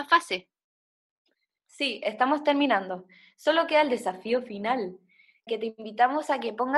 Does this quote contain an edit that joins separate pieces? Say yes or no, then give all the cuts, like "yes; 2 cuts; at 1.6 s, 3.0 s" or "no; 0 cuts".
yes; 1 cut; at 5.5 s